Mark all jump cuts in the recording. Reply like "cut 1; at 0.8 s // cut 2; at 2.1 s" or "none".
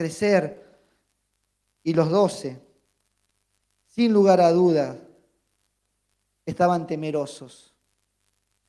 none

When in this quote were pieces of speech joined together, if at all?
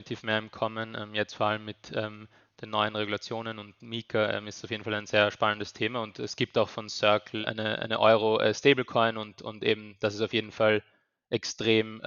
none

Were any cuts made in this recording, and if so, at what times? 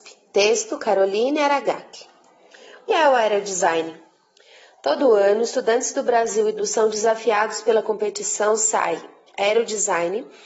cut 1; at 2.9 s // cut 2; at 6.6 s

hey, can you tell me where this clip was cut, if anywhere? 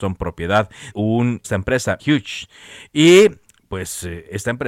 cut 1; at 0.9 s // cut 2; at 1.4 s // cut 3; at 2.0 s

